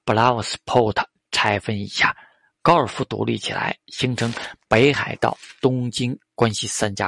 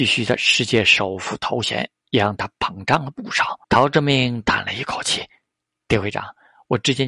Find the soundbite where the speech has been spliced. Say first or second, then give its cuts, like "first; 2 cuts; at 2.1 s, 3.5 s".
second; 1 cut; at 3.6 s